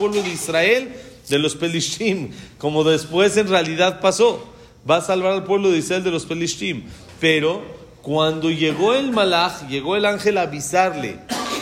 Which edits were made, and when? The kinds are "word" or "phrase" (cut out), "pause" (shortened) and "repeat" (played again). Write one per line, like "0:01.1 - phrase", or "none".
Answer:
none